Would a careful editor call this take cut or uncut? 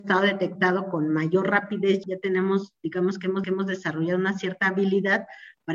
cut